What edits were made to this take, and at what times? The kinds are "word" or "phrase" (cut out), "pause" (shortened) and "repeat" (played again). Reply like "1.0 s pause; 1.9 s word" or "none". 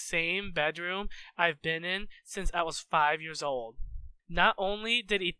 4.2 s pause